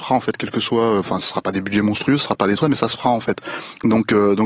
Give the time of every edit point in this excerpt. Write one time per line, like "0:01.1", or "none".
0:02.6